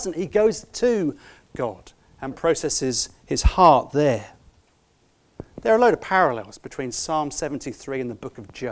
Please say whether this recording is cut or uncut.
uncut